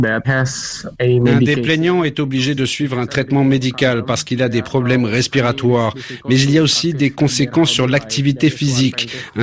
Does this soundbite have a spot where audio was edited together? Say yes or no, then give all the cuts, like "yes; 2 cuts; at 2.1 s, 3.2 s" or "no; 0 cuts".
no; 0 cuts